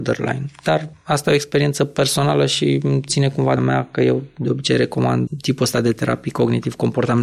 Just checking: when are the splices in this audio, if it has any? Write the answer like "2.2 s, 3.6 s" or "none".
3.6 s